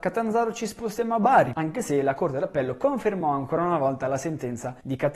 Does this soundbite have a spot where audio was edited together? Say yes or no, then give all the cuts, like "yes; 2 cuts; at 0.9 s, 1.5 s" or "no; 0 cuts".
no; 0 cuts